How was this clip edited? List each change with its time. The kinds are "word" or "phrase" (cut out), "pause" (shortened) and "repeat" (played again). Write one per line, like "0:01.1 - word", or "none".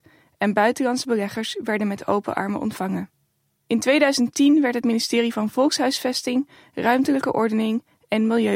none